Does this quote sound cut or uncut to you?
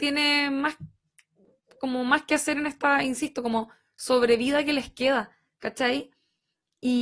uncut